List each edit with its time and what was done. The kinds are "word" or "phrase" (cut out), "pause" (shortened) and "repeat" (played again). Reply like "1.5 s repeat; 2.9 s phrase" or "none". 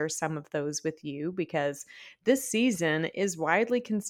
none